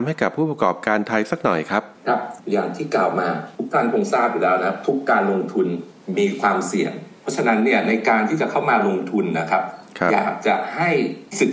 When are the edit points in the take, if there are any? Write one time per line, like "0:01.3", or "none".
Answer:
0:02.4